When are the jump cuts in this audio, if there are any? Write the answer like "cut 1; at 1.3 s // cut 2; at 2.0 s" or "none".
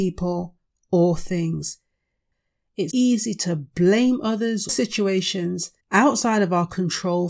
cut 1; at 2.9 s // cut 2; at 4.7 s // cut 3; at 5.8 s

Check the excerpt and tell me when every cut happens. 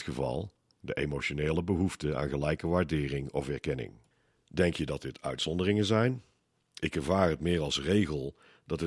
none

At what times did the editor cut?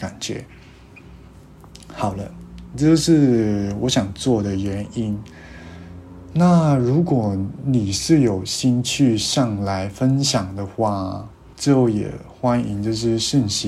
cut 1; at 11.5 s

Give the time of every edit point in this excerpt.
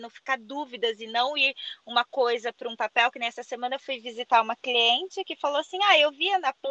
none

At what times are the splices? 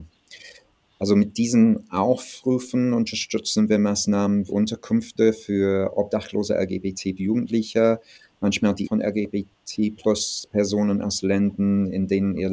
cut 1; at 4.5 s // cut 2; at 7.2 s // cut 3; at 8.8 s

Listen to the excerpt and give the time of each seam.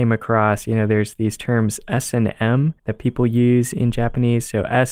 cut 1; at 2.8 s

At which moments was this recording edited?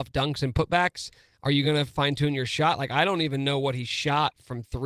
none

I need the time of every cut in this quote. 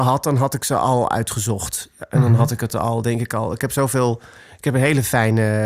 none

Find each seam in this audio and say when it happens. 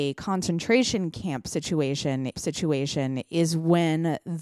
cut 1; at 2.3 s

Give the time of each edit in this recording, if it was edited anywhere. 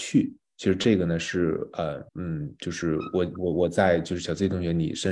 cut 1; at 2.1 s

